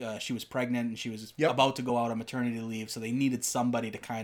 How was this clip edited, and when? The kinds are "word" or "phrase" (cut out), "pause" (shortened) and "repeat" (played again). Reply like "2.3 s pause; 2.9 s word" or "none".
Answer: none